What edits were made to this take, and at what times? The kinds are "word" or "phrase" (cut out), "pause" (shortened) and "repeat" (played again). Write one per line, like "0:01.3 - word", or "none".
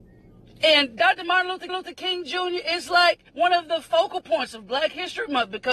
0:01.7 - repeat
0:03.3 - pause